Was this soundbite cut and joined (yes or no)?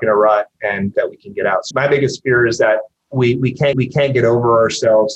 yes